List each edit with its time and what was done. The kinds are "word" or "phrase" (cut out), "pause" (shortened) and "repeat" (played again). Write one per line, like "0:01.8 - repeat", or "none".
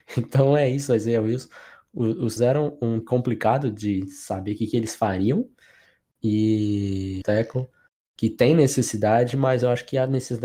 0:02.4 - word
0:03.0 - word
0:07.2 - phrase